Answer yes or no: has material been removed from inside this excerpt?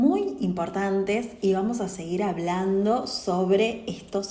no